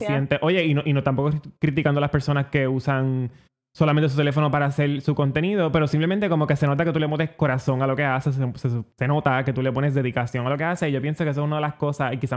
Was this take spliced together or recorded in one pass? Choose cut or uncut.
uncut